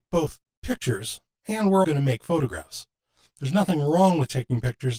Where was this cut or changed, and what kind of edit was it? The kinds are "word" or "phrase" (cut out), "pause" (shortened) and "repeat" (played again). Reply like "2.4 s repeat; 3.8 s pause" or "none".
1.8 s word